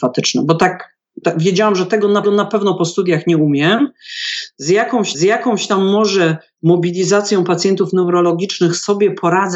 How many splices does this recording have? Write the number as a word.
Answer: three